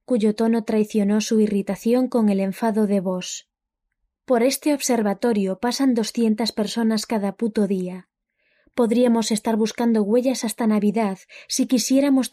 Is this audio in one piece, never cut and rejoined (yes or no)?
yes